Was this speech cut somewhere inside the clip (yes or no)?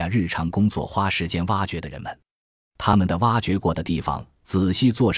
no